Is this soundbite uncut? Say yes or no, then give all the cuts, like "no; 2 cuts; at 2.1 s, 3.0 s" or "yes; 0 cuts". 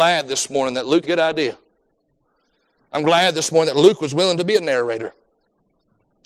no; 1 cut; at 1.0 s